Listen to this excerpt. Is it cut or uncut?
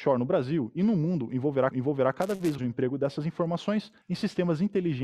cut